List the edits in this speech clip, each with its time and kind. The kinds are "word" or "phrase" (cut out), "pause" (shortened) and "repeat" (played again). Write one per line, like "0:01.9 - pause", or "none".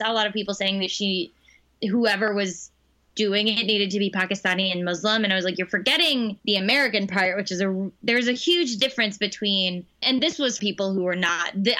0:02.9 - pause
0:06.4 - pause
0:10.0 - word
0:10.6 - word